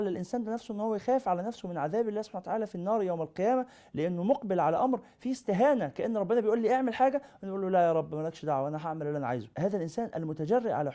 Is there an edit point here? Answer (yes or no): no